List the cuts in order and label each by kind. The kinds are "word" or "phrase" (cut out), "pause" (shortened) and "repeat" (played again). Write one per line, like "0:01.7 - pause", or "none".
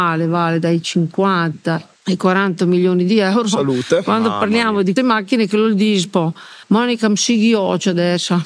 0:02.0 - pause
0:05.0 - word
0:06.6 - pause